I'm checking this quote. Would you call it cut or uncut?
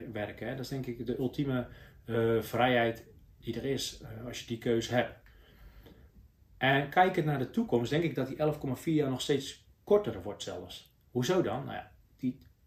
uncut